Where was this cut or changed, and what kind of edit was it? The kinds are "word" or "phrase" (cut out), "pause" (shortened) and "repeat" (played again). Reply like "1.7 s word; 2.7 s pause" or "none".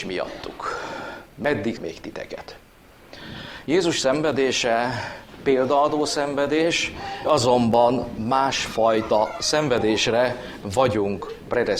1.7 s word; 7.2 s word